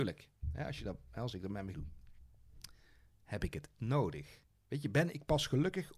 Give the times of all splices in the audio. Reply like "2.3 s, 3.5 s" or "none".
1.7 s, 3.8 s